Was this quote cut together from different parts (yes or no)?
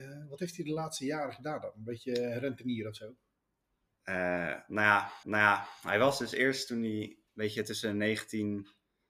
yes